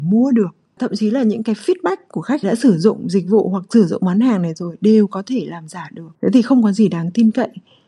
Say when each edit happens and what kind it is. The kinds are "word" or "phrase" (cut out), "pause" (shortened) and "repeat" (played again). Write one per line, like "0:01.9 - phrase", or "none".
0:02.4 - phrase
0:06.1 - pause